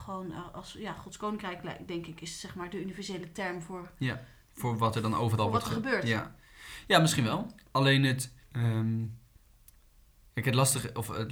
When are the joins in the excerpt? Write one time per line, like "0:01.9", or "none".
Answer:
0:08.4